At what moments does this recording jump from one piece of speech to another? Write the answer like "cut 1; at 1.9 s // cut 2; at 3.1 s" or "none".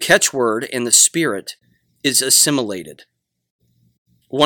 none